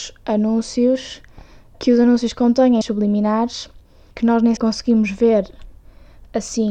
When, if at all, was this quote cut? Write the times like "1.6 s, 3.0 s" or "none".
1.7 s, 2.8 s, 4.1 s, 4.6 s